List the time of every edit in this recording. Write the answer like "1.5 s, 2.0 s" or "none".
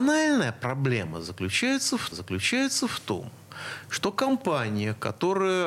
2.1 s